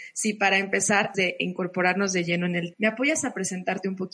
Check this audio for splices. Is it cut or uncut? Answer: cut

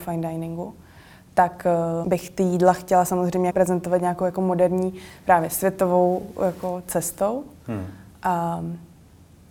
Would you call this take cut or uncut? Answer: cut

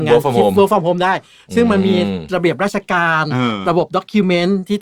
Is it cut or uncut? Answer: uncut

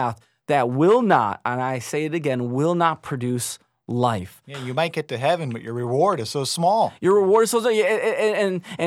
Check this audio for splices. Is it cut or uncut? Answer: uncut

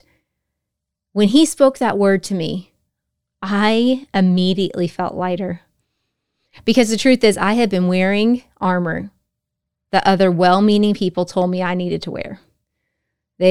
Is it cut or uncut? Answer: uncut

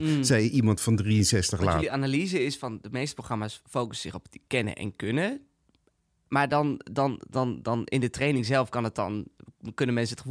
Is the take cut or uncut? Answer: uncut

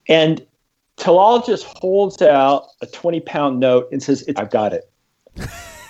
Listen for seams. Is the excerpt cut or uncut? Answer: cut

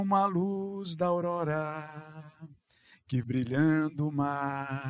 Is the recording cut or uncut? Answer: cut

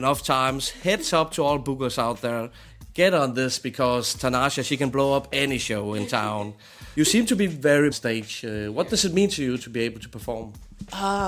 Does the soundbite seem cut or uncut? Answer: cut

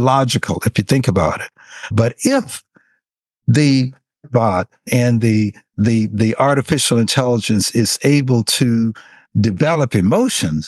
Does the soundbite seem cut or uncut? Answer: uncut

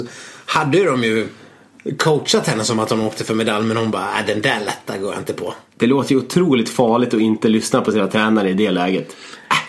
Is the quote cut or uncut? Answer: uncut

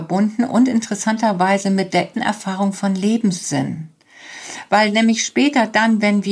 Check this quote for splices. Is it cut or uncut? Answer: cut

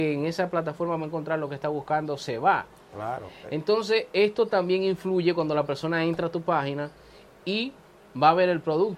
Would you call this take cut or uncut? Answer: uncut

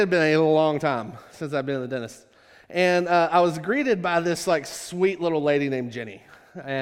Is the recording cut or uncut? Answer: uncut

